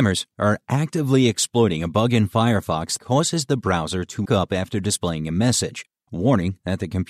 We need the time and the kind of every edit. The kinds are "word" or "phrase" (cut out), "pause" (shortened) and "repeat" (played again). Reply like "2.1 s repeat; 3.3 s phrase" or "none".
3.0 s word; 4.3 s word